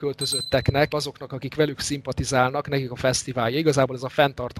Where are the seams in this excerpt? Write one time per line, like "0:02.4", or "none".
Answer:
0:00.9